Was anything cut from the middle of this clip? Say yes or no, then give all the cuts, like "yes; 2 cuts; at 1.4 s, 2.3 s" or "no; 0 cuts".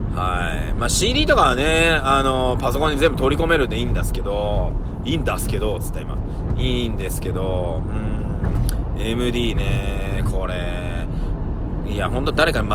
no; 0 cuts